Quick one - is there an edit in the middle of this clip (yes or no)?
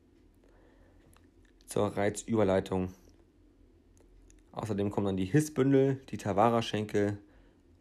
no